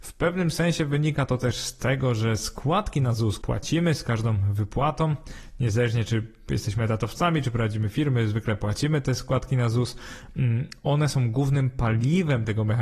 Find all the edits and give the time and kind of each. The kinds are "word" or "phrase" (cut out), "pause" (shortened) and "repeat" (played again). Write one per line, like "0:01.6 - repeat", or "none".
0:03.4 - word